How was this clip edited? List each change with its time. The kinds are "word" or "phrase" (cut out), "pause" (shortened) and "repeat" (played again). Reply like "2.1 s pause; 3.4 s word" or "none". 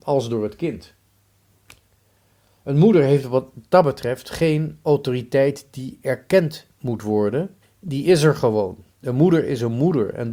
7.6 s pause; 8.9 s pause